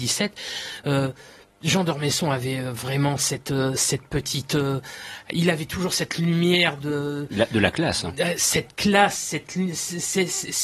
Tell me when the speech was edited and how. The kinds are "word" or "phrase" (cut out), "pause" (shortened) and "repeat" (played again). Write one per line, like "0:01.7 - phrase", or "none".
none